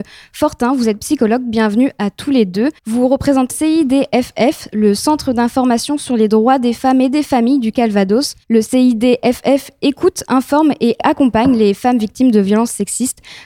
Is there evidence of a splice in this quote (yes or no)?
yes